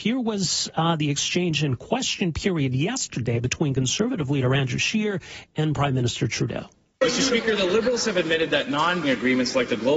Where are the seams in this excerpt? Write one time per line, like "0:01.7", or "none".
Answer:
0:09.0